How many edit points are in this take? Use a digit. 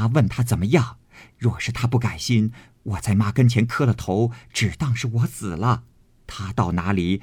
0